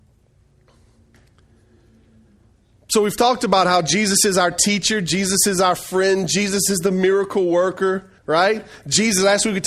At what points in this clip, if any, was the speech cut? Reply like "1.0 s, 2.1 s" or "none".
8.2 s